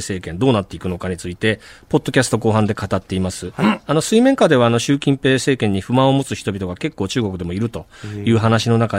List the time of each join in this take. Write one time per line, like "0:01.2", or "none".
none